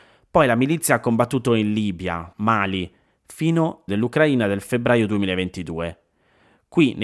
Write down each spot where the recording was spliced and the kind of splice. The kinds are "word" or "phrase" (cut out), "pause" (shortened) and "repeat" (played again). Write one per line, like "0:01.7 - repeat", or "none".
0:02.3 - word
0:03.9 - word